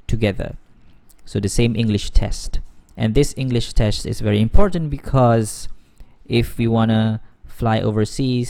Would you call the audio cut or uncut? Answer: uncut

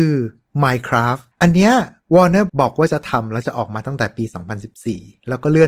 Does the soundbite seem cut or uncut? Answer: cut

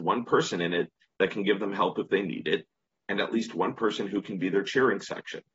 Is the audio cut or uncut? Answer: uncut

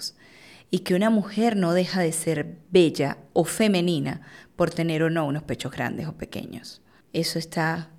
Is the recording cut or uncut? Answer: cut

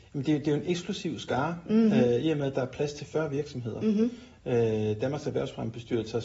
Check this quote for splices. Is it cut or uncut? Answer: uncut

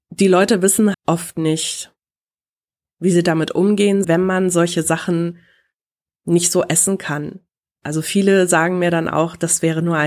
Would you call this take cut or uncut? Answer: cut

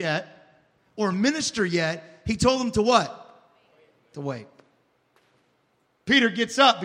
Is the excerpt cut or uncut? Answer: uncut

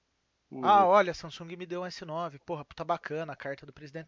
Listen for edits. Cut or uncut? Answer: uncut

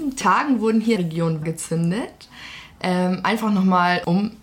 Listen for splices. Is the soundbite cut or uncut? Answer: cut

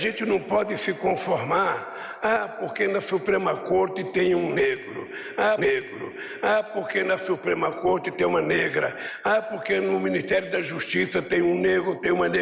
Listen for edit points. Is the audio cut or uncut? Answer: cut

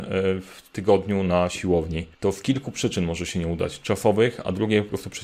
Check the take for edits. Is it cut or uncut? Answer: cut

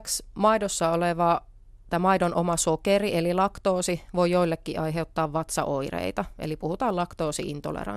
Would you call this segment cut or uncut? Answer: uncut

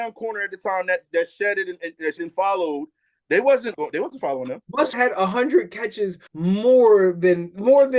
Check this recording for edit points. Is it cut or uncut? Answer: cut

